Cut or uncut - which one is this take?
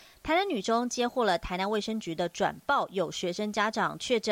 uncut